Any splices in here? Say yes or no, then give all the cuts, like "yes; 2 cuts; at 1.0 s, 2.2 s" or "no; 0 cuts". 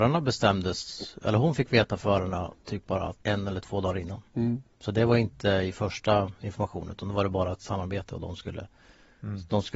yes; 3 cuts; at 2.6 s, 3.2 s, 4.3 s